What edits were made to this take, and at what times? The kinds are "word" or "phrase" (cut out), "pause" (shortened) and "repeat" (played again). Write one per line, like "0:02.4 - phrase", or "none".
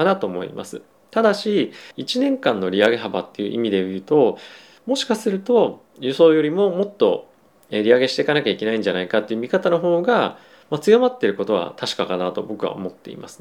0:01.9 - pause